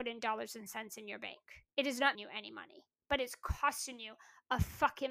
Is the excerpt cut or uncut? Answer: cut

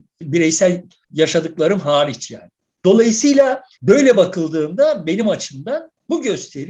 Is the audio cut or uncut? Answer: uncut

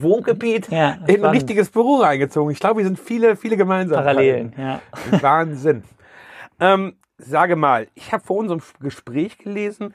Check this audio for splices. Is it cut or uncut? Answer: uncut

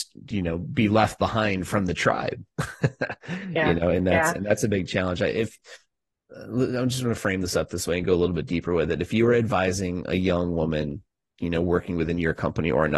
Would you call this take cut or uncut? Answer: uncut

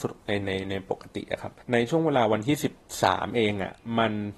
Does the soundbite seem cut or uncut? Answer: cut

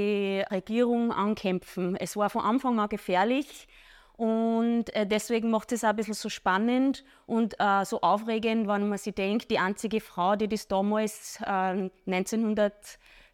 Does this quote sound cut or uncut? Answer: uncut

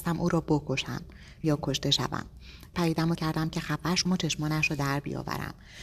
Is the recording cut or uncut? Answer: cut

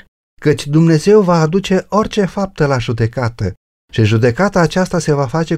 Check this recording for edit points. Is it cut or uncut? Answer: uncut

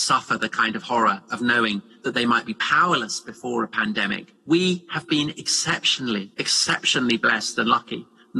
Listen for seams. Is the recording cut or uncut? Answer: cut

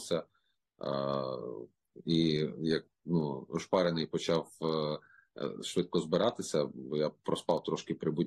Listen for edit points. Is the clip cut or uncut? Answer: uncut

